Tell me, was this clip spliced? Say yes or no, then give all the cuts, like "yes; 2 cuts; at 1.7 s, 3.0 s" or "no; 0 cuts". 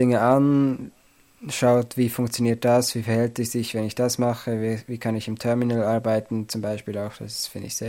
no; 0 cuts